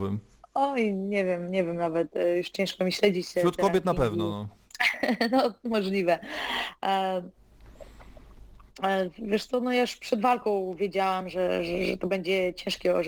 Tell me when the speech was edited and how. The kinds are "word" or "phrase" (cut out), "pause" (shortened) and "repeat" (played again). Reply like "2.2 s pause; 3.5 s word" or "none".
none